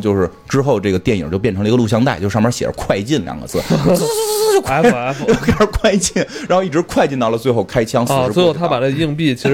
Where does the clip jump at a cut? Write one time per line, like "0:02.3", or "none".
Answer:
none